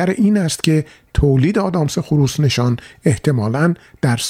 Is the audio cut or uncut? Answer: uncut